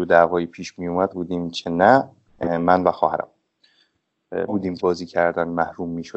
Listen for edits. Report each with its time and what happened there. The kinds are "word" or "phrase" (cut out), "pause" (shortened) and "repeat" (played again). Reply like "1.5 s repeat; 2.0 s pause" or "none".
1.1 s phrase; 2.3 s pause; 4.5 s word; 4.8 s word